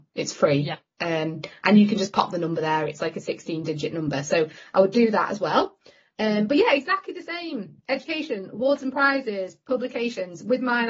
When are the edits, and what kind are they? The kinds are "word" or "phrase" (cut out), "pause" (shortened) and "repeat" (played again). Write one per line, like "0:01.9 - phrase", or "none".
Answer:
none